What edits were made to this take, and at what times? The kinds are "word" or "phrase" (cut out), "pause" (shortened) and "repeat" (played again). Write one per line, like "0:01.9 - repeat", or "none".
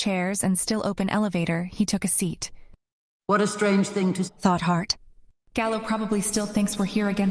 0:04.3 - word